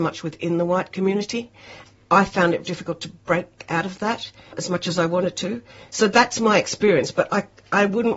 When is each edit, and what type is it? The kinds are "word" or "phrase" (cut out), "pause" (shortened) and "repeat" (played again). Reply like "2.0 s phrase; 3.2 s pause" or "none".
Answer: 2.6 s word